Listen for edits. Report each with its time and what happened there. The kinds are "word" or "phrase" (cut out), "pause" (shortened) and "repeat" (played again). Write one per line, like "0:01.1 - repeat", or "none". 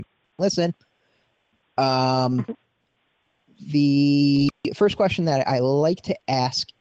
none